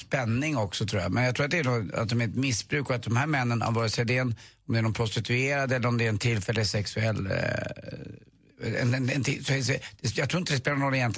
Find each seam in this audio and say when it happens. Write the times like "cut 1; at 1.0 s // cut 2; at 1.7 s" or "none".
none